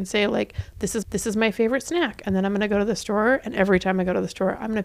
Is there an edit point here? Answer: yes; 1 cut; at 1.0 s

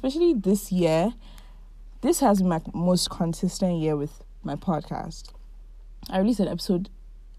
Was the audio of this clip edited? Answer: no; 0 cuts

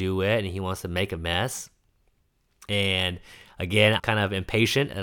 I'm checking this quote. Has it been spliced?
yes; 1 cut; at 4.0 s

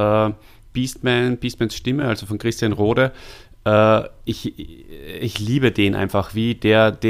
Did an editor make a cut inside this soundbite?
no; 0 cuts

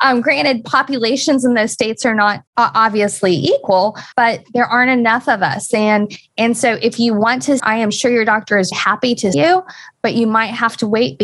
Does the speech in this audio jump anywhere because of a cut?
yes; 5 cuts; at 2.5 s, 4.1 s, 7.6 s, 8.7 s, 9.3 s

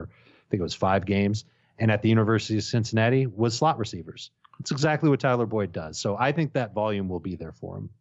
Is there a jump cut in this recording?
no; 0 cuts

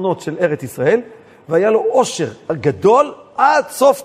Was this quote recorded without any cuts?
yes; 0 cuts

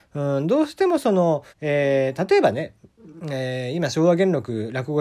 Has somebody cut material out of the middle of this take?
yes; 1 cut; at 1.5 s

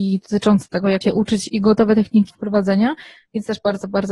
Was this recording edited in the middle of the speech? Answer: yes; 2 cuts; at 1.0 s, 2.3 s

